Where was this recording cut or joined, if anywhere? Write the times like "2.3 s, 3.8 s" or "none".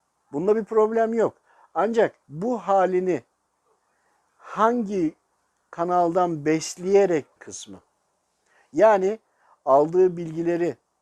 2.2 s, 7.4 s